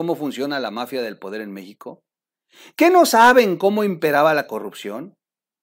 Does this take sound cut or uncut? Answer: uncut